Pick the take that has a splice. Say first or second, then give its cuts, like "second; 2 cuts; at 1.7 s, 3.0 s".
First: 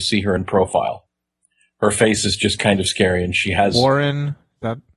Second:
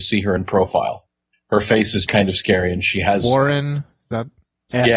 second; 2 cuts; at 1.3 s, 2.1 s